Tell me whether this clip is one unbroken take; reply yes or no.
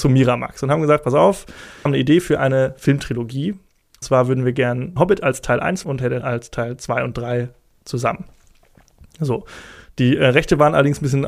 no